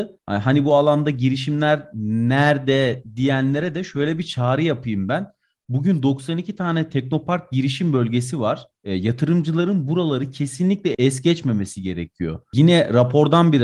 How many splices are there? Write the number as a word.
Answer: zero